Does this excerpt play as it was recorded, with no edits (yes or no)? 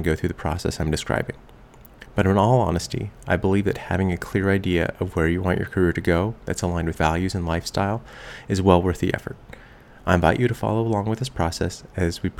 no